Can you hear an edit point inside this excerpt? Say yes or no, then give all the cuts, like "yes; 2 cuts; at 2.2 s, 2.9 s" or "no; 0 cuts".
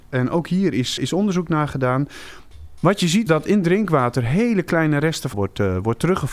yes; 3 cuts; at 1.0 s, 3.3 s, 5.3 s